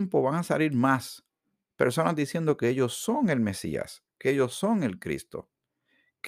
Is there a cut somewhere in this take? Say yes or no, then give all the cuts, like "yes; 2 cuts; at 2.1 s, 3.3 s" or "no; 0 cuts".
no; 0 cuts